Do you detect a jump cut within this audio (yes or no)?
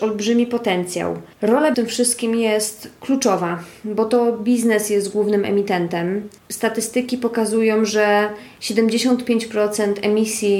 yes